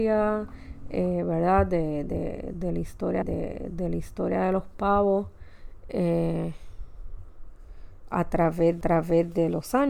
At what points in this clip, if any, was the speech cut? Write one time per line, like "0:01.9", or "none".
0:03.2
0:08.8